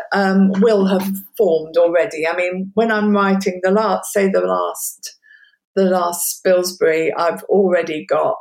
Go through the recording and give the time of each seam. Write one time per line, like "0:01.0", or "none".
none